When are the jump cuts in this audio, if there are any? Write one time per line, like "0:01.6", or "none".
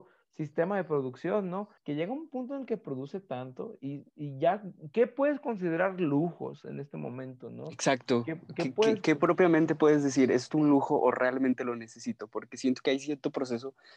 0:01.8